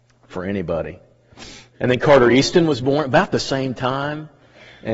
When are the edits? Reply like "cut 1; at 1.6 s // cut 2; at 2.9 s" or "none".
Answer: none